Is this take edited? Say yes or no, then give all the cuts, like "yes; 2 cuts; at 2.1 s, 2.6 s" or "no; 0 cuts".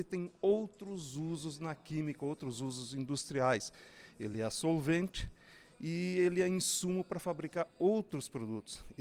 no; 0 cuts